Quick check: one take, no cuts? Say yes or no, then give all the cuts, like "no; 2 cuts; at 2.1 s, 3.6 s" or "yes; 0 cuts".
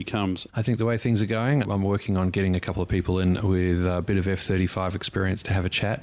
no; 1 cut; at 1.6 s